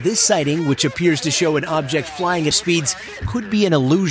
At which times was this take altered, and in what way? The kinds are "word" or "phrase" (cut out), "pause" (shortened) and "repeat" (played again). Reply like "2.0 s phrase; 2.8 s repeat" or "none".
2.5 s word